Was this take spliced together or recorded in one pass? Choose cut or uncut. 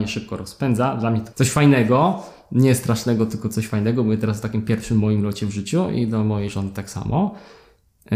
cut